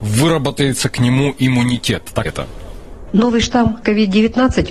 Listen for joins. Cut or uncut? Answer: cut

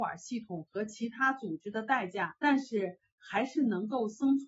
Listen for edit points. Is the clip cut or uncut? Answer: cut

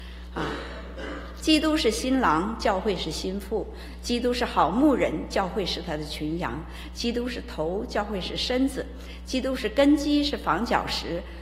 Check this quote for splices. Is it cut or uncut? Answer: uncut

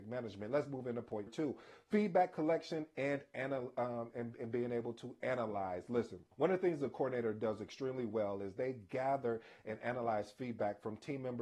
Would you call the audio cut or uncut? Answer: cut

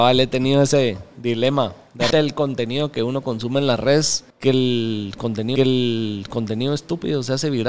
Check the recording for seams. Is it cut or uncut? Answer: cut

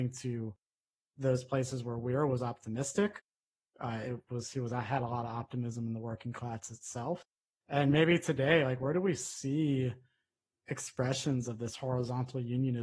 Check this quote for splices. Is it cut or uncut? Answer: uncut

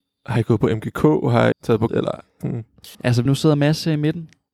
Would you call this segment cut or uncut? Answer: cut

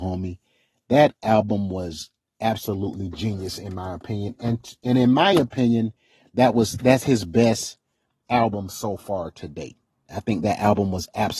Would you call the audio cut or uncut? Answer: uncut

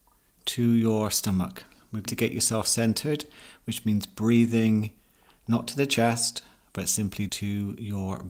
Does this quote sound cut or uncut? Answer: cut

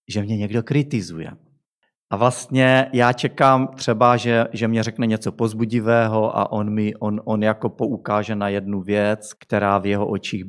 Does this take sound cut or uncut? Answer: cut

